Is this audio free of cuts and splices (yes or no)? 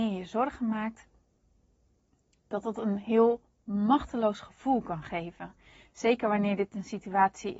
yes